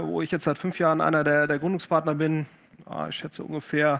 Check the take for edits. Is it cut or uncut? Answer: uncut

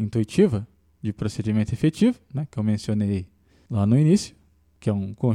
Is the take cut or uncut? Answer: uncut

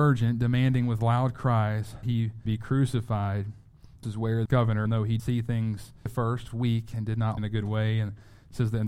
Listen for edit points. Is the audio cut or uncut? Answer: cut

